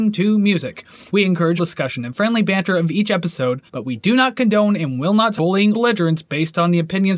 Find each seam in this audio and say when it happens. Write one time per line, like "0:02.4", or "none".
0:01.1
0:01.6
0:03.7
0:05.4
0:05.7